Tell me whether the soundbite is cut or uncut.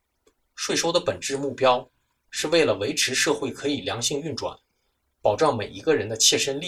uncut